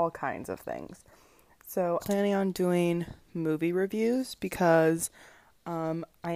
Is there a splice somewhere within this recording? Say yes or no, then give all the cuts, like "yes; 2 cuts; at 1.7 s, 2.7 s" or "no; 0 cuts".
yes; 1 cut; at 2.0 s